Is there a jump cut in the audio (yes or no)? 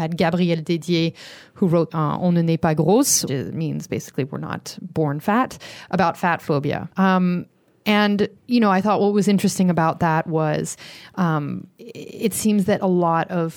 yes